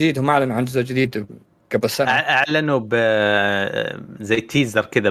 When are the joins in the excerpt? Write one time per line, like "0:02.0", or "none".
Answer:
none

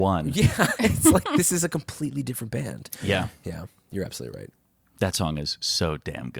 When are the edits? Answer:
none

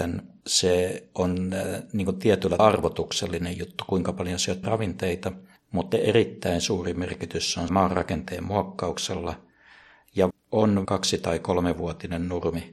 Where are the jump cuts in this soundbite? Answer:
0:02.6
0:04.6
0:05.9
0:07.7
0:10.3
0:10.8

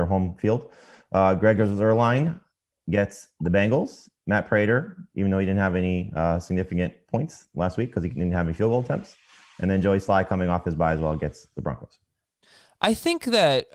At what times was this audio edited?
none

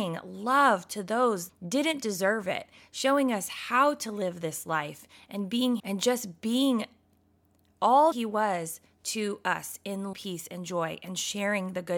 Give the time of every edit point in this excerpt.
0:01.5
0:05.8
0:08.1
0:10.1

